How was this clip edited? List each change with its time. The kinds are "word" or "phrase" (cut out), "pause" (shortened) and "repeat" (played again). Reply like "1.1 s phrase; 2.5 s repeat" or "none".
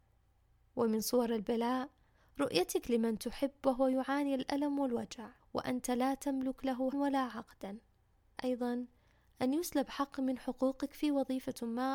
5.4 s pause; 6.9 s word; 8.4 s phrase

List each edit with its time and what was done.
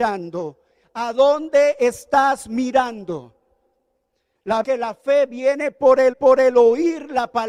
4.6 s phrase; 6.1 s repeat

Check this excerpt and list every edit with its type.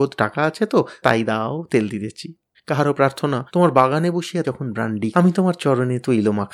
1.0 s word; 2.5 s pause; 3.5 s pause; 4.4 s word; 5.1 s word

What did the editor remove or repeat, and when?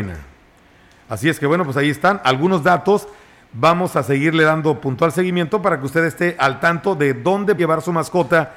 7.6 s word

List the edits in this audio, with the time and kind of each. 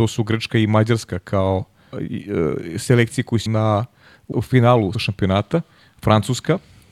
1.9 s word; 3.5 s word; 4.3 s word; 4.9 s word

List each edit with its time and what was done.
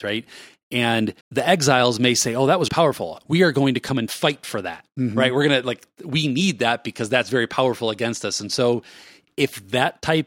1.2 s pause; 2.7 s word

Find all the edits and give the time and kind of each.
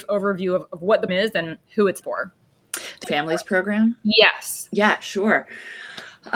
1.1 s word; 2.0 s word; 3.0 s word

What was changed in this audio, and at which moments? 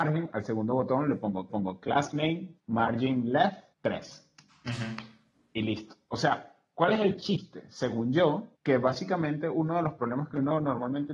1.5 s repeat; 2.6 s pause; 3.7 s pause; 8.5 s pause

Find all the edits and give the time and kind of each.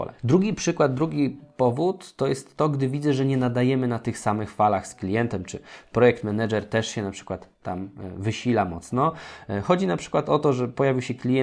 none

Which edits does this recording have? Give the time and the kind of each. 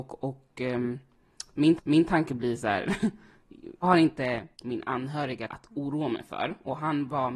1.8 s repeat; 3.8 s word; 4.5 s pause; 5.5 s word

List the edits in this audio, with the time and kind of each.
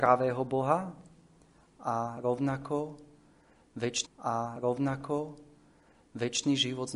4.1 s repeat

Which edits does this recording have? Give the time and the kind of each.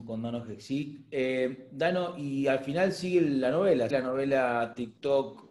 3.9 s word

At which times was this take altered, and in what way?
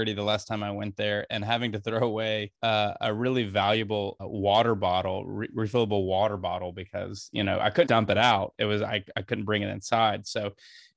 2.5 s pause; 4.2 s word; 7.9 s word

